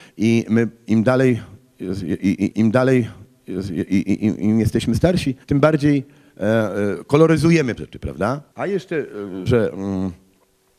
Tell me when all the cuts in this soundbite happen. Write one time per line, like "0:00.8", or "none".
0:02.5
0:05.4
0:07.8
0:08.5
0:09.5